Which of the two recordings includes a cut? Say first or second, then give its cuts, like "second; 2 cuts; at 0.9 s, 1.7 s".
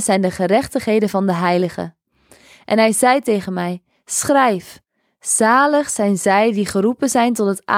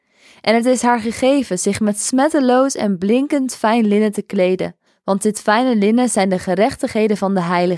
second; 1 cut; at 4.9 s